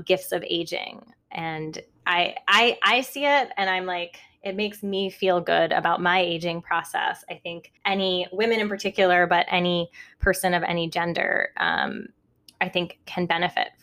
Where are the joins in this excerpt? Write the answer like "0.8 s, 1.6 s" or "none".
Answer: 1.2 s, 7.8 s

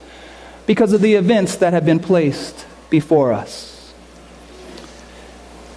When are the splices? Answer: none

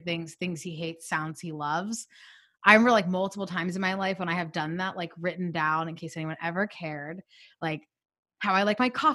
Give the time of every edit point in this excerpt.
none

